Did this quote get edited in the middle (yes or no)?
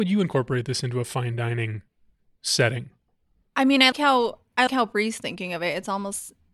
yes